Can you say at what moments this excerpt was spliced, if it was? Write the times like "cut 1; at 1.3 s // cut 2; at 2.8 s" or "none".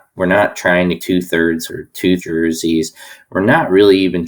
cut 1; at 1.0 s // cut 2; at 1.7 s // cut 3; at 2.2 s